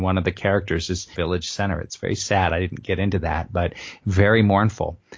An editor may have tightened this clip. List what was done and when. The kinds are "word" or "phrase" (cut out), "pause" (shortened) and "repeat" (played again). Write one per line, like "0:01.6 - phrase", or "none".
0:01.1 - phrase